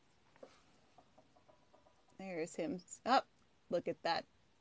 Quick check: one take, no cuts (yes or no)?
yes